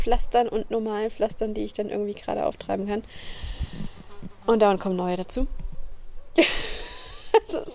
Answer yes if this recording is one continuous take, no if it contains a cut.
yes